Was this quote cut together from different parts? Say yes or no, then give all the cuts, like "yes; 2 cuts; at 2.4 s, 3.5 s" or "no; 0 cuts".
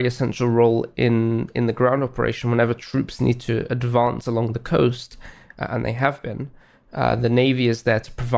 no; 0 cuts